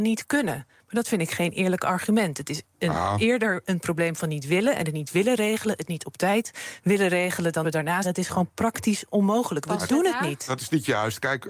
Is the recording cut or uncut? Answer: cut